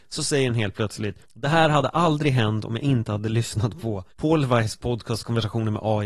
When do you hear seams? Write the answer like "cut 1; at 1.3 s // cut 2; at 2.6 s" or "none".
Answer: cut 1; at 1.2 s // cut 2; at 4.1 s